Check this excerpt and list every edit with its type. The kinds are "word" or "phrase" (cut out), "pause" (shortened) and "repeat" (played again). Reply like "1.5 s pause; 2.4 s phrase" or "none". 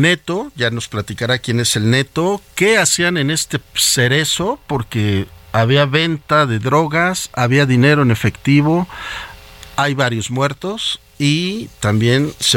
3.7 s pause

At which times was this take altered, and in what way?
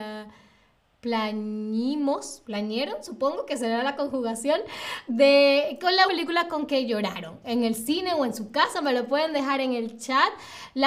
2.4 s word; 5.1 s word; 6.1 s word

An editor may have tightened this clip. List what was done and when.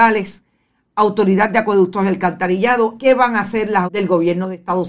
3.0 s word; 3.9 s word

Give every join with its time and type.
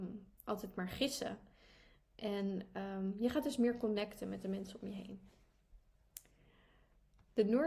none

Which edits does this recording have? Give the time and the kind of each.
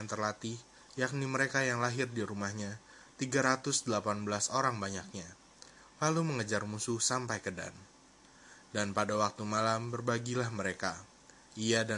none

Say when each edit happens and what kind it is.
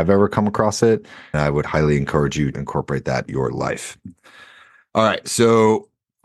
1.3 s word; 1.6 s word; 2.5 s word; 3.3 s word

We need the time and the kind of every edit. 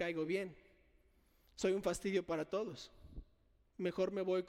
none

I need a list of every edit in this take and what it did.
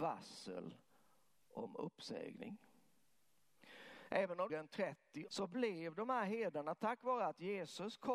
4.5 s phrase; 5.3 s word

